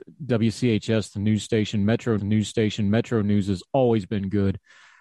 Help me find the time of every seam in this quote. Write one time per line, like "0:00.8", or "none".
0:02.2